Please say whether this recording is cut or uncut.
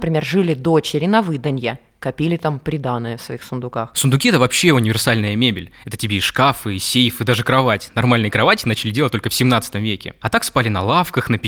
uncut